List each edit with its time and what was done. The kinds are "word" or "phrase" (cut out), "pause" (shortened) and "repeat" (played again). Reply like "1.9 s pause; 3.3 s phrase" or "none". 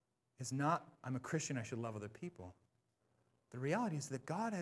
none